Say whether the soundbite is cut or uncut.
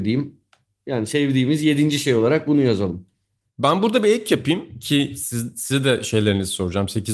uncut